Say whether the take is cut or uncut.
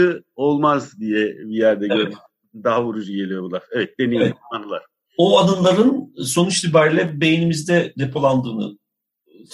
uncut